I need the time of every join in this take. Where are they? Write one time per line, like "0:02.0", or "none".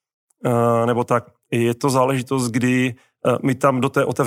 none

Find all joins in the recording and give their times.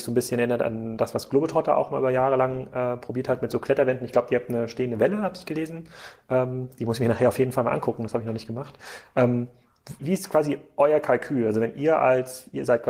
0:10.0

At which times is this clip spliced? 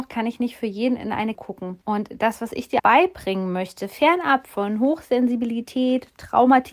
0:01.3
0:01.8
0:02.8

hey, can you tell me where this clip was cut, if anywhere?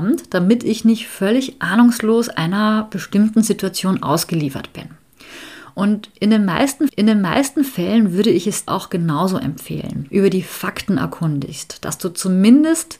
0:06.9
0:08.7
0:10.1

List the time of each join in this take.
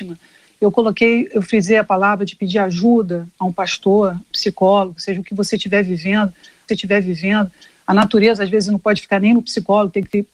0:04.3
0:06.7

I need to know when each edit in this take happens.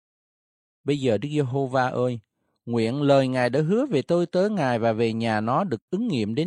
none

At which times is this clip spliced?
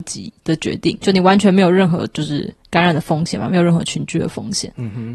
0:01.0

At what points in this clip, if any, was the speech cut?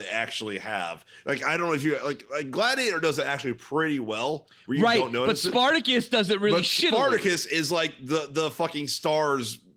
none

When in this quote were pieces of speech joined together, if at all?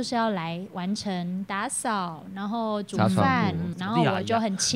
0:03.7

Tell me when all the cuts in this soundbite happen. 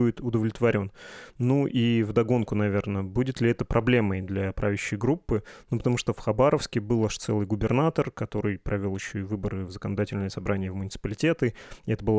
none

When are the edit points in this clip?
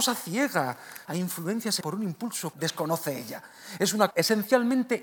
0:01.0
0:01.8
0:02.5
0:04.1

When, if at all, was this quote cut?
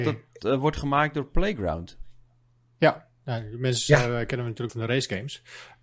0:04.7

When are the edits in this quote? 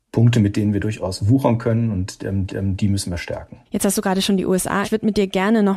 0:02.5
0:03.7
0:04.8

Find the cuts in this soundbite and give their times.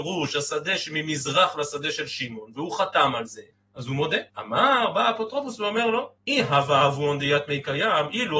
0:03.5
0:04.3
0:06.2

